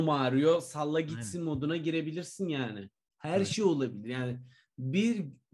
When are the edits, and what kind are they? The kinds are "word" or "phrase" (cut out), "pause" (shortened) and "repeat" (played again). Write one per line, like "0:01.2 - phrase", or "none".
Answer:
none